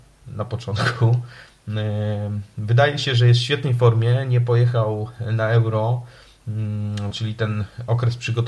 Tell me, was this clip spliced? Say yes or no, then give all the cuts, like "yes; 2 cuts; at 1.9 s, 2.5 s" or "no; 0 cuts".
no; 0 cuts